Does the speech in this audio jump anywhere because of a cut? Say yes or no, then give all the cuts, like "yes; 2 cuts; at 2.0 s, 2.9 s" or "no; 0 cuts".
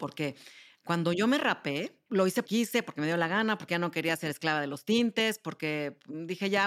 yes; 2 cuts; at 2.1 s, 2.4 s